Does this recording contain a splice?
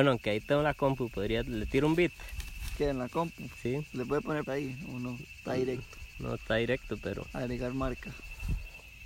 yes; 2 cuts; at 4.5 s, 6.1 s

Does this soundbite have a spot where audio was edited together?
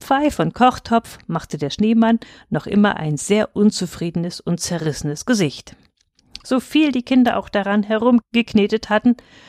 no; 0 cuts

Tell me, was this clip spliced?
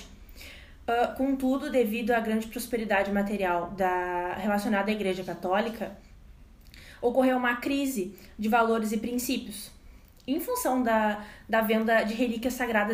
no; 0 cuts

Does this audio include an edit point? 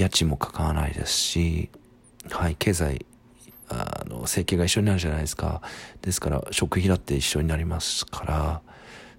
no; 0 cuts

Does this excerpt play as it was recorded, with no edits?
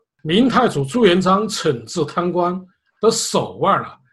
yes; 0 cuts

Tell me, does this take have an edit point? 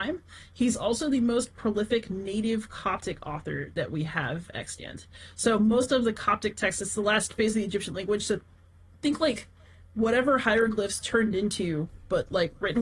no; 0 cuts

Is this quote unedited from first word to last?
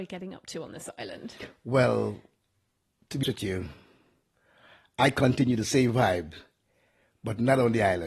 no; 1 cut; at 3.2 s

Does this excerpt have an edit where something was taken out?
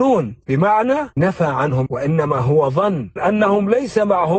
yes; 3 cuts; at 1.2 s, 1.9 s, 3.2 s

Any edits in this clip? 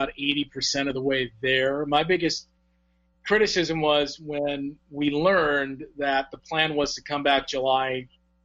no; 0 cuts

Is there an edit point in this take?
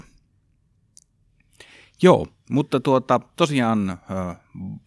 no; 0 cuts

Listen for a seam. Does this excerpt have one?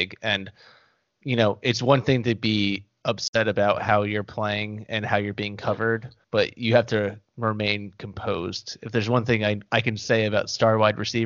yes; 1 cut; at 6.2 s

